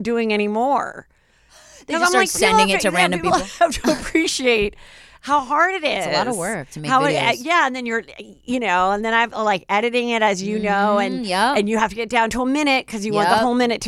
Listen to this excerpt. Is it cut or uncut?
uncut